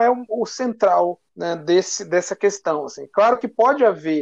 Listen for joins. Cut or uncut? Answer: cut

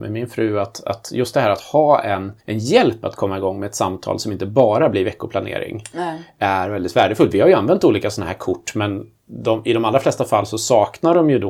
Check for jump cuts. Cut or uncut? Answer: cut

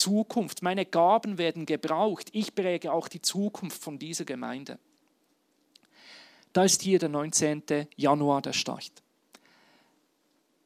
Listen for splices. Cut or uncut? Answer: uncut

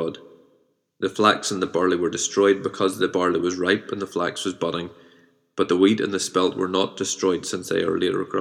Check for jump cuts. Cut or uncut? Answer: uncut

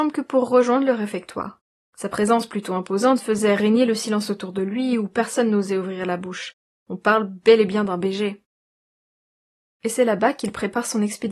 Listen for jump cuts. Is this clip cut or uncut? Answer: uncut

